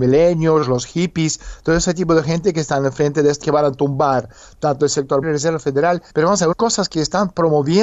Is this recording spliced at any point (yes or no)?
yes